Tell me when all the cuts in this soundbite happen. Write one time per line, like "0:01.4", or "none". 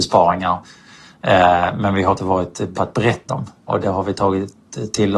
0:02.2
0:02.7
0:03.3
0:03.8